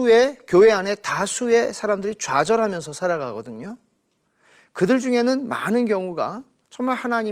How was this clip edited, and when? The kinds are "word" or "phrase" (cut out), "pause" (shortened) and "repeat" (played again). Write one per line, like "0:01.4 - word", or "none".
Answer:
none